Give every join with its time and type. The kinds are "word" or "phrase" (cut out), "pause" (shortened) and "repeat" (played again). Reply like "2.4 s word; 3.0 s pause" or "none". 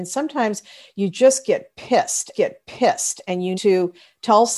2.3 s repeat; 3.5 s word